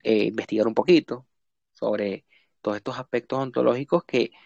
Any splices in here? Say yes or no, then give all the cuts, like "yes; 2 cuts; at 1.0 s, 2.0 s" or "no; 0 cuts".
no; 0 cuts